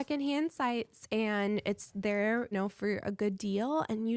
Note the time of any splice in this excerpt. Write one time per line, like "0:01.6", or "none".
0:02.5